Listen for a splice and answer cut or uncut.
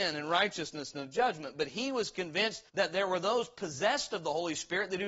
cut